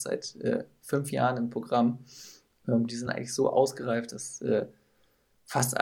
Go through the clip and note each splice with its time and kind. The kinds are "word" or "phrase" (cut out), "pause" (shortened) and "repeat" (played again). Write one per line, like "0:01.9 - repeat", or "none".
none

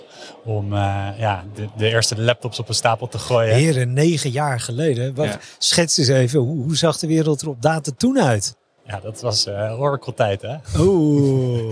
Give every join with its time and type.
none

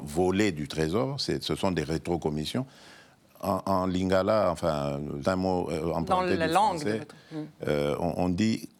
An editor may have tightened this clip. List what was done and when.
0:05.2 - word

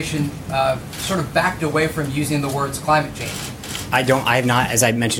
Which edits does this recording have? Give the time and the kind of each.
none

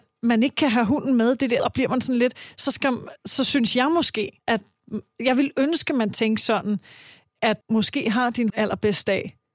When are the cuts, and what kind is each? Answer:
0:01.6 - word
0:04.4 - pause
0:07.6 - pause
0:08.5 - word

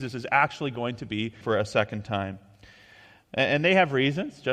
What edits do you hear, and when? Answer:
0:01.4 - word

